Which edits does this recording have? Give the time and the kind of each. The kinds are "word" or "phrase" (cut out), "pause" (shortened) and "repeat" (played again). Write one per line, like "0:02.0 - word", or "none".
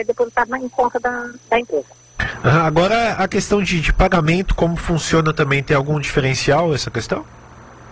none